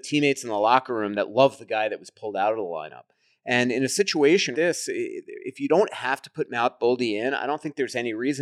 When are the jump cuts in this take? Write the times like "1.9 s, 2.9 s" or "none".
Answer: 4.5 s